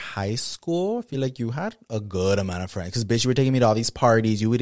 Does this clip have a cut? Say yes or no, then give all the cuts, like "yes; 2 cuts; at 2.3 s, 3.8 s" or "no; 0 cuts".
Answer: no; 0 cuts